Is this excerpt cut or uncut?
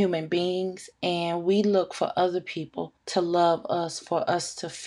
cut